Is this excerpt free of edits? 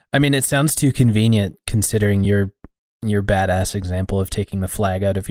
yes; 0 cuts

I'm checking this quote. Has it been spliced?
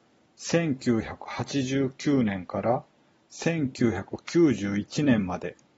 no; 0 cuts

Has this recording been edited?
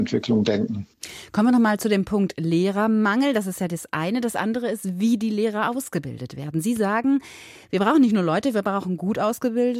no; 0 cuts

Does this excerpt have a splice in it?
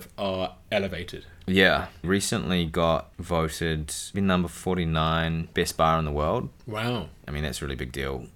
yes; 2 cuts; at 2.0 s, 4.1 s

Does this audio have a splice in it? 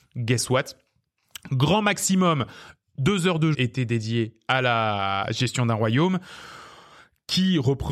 yes; 1 cut; at 3.5 s

